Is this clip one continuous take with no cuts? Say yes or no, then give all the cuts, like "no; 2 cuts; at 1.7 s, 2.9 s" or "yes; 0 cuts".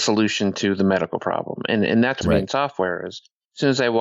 no; 1 cut; at 2.2 s